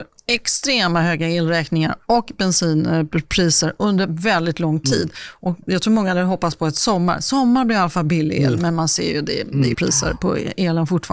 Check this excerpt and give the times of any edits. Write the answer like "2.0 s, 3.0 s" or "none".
9.7 s